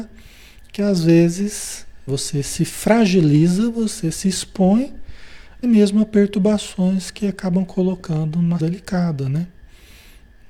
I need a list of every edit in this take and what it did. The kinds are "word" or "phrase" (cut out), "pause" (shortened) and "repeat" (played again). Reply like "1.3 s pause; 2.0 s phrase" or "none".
2.1 s word; 5.6 s word; 8.6 s word